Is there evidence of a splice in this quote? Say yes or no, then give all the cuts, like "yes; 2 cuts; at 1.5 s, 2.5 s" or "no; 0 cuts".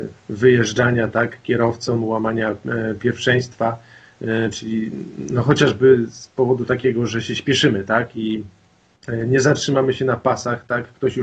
no; 0 cuts